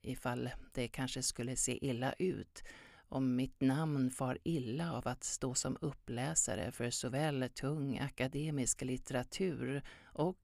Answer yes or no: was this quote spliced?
no